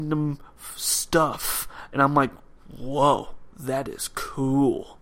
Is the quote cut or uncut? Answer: cut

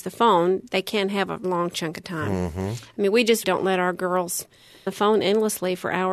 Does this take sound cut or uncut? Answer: cut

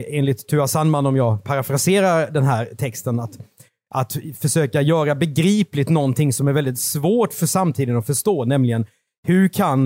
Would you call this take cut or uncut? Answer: uncut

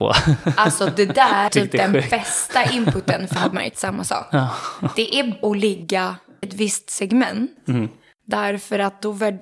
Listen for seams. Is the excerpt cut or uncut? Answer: cut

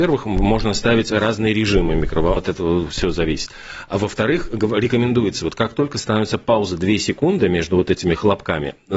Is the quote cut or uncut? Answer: cut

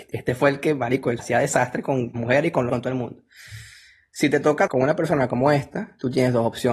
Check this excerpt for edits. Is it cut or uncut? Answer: cut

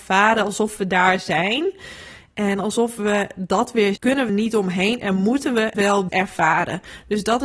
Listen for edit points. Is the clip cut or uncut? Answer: cut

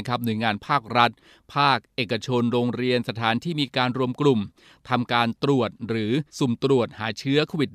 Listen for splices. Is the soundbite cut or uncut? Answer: cut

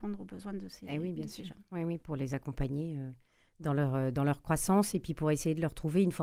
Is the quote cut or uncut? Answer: uncut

